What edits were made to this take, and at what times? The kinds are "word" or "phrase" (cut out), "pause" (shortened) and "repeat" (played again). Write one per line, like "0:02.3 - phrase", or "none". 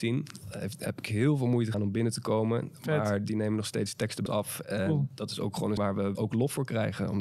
0:01.7 - word
0:04.3 - word
0:05.8 - word
0:06.1 - word